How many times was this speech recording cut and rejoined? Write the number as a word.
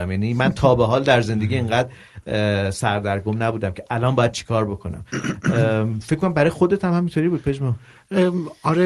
zero